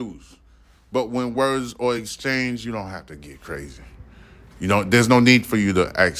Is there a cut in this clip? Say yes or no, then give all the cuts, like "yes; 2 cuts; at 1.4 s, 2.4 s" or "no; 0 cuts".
no; 0 cuts